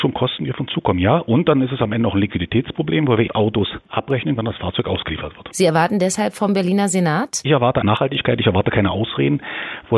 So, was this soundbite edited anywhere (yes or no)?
yes